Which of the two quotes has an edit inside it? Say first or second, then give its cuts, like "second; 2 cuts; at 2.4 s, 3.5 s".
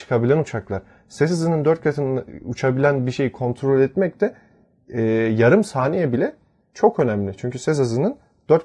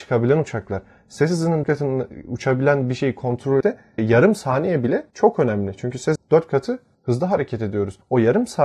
second; 5 cuts; at 1.6 s, 3.6 s, 4.0 s, 5.1 s, 6.2 s